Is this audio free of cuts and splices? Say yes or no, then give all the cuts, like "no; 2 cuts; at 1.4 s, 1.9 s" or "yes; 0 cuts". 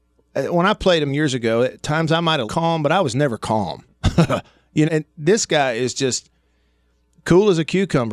no; 3 cuts; at 1.1 s, 2.5 s, 4.9 s